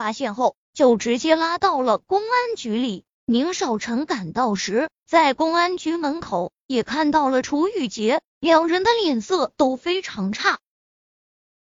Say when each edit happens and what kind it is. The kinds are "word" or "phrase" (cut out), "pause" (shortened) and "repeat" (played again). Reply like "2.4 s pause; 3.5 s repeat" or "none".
3.1 s pause; 8.3 s pause